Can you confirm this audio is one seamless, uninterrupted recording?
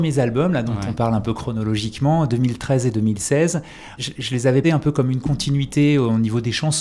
no; 2 cuts; at 4.0 s, 4.6 s

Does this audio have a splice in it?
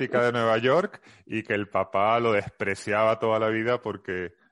no; 0 cuts

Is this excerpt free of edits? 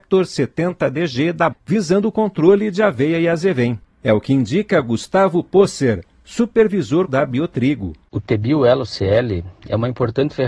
no; 2 cuts; at 1.5 s, 7.1 s

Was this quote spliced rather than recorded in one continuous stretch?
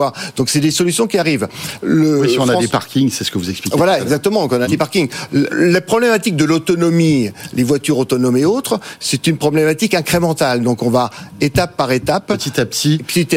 yes; 3 cuts; at 2.7 s, 4.6 s, 5.5 s

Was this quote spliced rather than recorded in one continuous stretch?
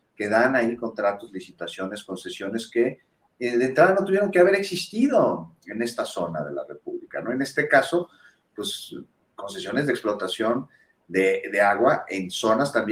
no; 0 cuts

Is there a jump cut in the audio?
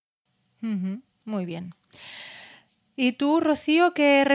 no; 0 cuts

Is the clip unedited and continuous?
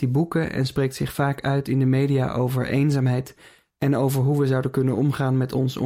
yes; 0 cuts

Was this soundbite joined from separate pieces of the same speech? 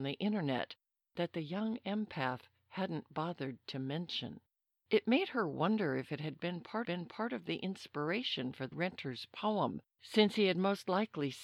yes; 4 cuts; at 4.7 s, 6.8 s, 8.7 s, 9.9 s

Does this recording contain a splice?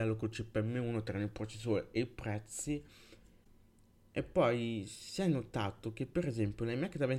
no; 0 cuts

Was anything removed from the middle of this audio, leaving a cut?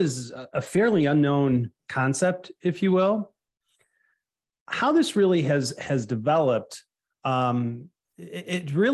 no; 0 cuts

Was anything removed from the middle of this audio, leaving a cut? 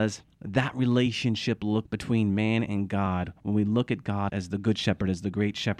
yes; 2 cuts; at 1.9 s, 4.3 s

